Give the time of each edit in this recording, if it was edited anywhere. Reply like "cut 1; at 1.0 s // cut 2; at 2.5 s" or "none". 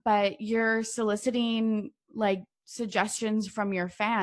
none

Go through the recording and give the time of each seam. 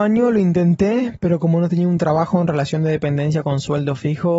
none

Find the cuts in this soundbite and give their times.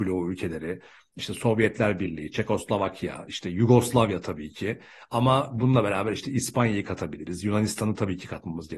none

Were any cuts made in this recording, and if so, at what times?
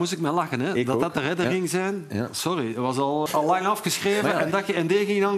cut 1; at 3.3 s

